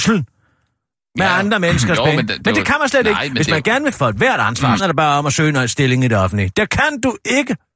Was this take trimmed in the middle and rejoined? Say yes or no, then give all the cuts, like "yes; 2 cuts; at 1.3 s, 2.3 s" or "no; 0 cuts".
yes; 2 cuts; at 4.0 s, 4.8 s